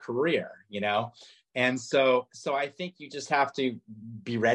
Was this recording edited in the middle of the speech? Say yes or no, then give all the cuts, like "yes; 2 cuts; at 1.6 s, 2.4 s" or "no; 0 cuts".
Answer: no; 0 cuts